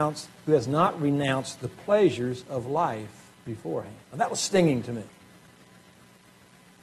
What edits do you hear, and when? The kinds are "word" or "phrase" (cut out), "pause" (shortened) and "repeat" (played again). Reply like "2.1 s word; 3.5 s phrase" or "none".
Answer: 4.0 s pause